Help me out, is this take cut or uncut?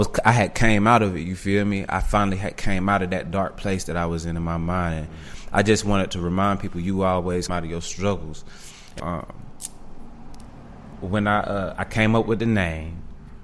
cut